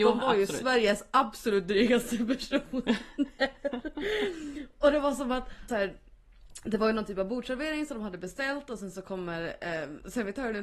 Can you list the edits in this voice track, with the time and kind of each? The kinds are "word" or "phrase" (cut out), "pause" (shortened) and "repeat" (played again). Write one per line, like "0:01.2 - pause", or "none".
0:05.7 - phrase